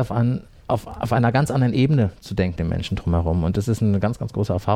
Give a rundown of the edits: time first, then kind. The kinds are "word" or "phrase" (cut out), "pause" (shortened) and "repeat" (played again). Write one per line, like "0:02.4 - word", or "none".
0:02.6 - word